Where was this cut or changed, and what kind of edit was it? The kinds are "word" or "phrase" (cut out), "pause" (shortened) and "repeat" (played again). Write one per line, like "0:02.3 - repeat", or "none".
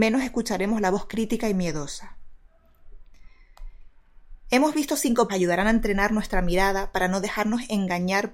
0:05.3 - phrase